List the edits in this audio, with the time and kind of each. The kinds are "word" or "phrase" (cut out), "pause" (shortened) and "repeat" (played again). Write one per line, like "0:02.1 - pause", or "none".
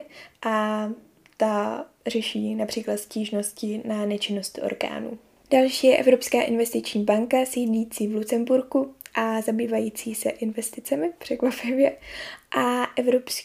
none